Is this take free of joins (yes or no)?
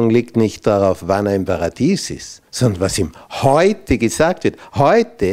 no